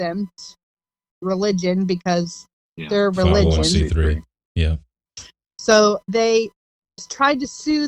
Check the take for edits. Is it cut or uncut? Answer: cut